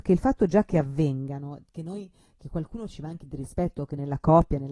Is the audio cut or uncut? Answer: uncut